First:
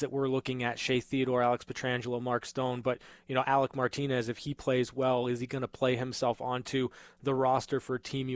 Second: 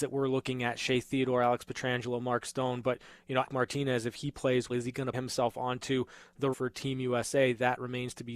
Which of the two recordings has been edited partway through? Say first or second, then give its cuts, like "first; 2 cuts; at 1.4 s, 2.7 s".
second; 4 cuts; at 3.5 s, 4.7 s, 5.1 s, 6.5 s